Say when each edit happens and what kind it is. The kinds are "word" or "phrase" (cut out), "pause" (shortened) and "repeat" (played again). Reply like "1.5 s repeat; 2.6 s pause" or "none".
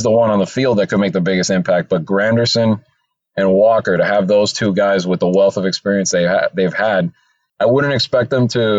none